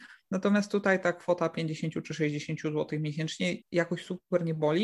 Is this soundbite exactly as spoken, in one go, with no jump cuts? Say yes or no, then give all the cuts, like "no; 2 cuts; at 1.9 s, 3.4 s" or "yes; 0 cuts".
no; 1 cut; at 3.6 s